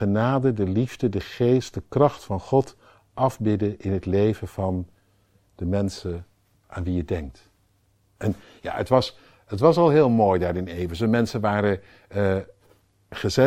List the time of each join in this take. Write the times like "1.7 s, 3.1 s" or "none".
none